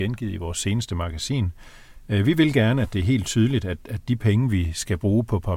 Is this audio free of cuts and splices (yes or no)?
yes